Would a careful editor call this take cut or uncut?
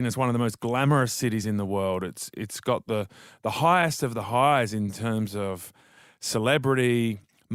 uncut